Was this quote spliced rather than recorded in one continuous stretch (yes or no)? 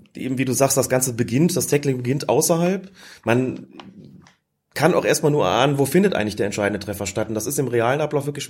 no